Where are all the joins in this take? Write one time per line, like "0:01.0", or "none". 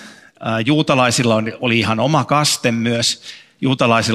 none